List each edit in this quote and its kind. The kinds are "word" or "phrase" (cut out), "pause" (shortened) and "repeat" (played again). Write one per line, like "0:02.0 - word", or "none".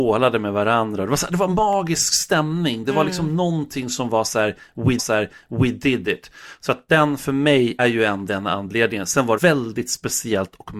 0:05.0 - repeat
0:07.8 - word
0:08.3 - word
0:09.4 - word